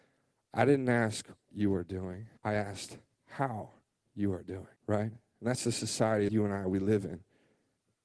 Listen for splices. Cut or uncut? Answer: cut